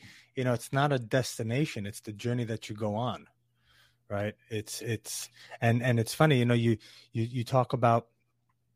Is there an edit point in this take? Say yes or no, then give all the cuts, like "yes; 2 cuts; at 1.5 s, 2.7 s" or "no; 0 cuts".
no; 0 cuts